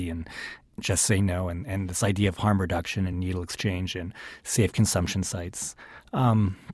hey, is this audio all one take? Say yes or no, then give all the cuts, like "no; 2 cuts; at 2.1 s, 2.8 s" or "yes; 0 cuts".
yes; 0 cuts